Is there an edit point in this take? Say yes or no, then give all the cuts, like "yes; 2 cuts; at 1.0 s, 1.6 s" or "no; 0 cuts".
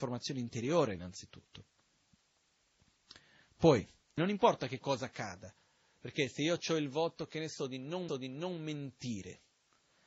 yes; 2 cuts; at 4.2 s, 8.1 s